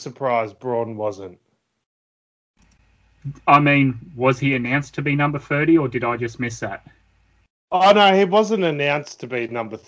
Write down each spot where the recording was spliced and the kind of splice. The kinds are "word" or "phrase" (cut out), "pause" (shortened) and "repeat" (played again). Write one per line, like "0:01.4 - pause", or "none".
none